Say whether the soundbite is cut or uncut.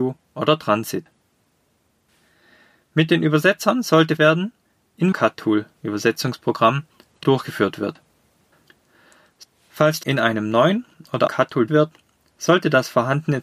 cut